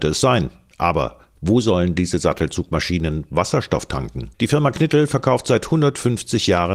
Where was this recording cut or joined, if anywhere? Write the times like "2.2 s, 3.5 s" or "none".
4.3 s